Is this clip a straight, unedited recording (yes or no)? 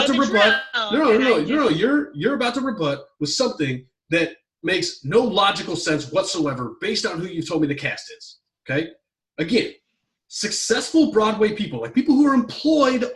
yes